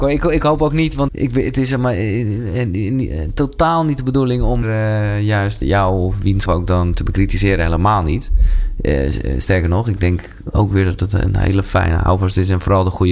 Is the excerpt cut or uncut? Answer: cut